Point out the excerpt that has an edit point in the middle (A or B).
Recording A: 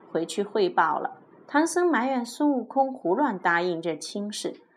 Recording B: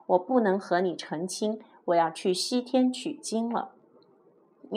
A